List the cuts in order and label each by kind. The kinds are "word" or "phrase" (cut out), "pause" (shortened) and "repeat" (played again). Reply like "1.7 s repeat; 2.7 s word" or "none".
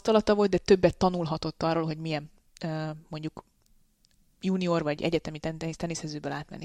none